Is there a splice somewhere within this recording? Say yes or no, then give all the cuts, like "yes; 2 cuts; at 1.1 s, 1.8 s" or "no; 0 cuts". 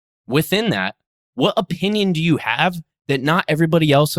no; 0 cuts